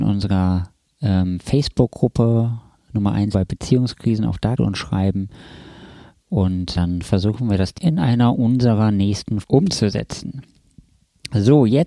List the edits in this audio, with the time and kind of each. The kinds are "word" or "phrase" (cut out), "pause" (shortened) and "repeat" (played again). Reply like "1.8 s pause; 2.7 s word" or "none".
3.3 s word; 4.6 s word; 6.7 s word; 7.7 s word; 9.4 s word